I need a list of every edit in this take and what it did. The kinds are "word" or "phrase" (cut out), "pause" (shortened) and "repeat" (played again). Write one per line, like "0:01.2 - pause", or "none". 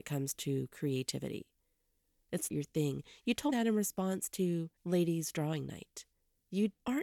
0:02.5 - word
0:03.5 - word
0:04.8 - pause